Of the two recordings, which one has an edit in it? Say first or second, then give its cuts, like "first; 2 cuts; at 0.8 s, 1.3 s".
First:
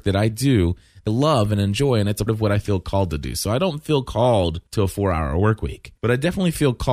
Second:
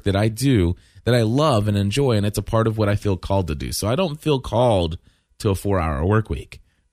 first; 4 cuts; at 1.1 s, 2.3 s, 4.7 s, 6.0 s